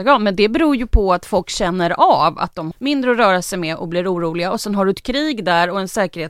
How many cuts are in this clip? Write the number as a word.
one